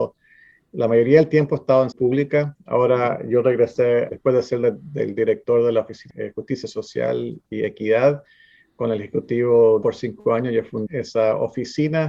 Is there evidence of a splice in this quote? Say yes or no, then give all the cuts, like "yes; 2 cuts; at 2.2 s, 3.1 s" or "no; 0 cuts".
yes; 5 cuts; at 1.9 s, 4.1 s, 6.1 s, 9.8 s, 10.9 s